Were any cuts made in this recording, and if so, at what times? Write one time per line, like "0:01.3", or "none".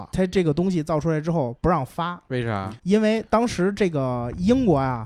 0:02.8